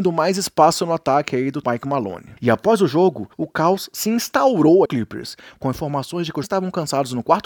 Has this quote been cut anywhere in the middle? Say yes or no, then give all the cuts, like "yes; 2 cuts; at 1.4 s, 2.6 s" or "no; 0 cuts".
yes; 5 cuts; at 1.6 s, 2.4 s, 3.3 s, 4.9 s, 6.4 s